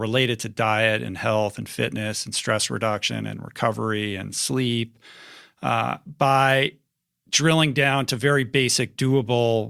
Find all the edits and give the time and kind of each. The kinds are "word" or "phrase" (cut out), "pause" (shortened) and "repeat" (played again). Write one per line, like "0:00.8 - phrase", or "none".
none